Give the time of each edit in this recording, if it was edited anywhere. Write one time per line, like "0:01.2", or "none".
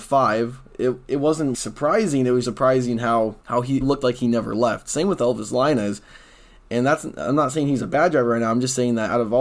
0:01.5
0:02.4
0:03.4
0:03.8

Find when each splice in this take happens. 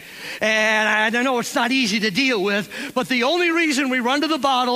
none

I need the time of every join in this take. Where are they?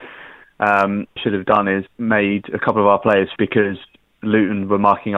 0:01.2
0:01.9
0:03.4

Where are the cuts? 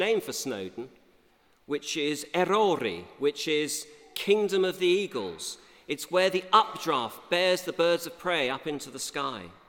none

